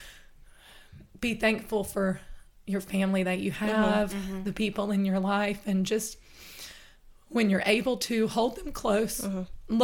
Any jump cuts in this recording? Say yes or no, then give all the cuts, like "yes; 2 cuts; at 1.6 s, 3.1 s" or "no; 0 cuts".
no; 0 cuts